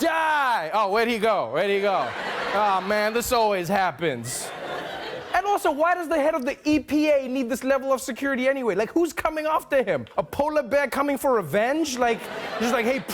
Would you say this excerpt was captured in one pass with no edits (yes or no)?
no